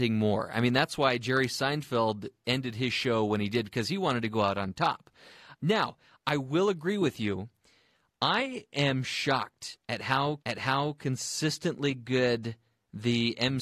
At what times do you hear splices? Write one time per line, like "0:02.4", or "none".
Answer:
0:10.4